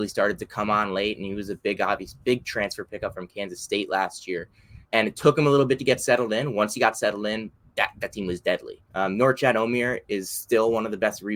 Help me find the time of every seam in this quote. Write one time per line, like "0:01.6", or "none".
0:04.8
0:08.9